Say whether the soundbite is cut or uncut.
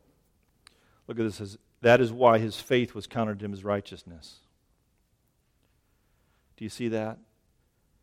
uncut